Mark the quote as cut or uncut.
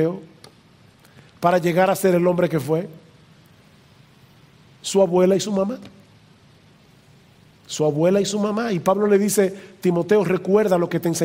uncut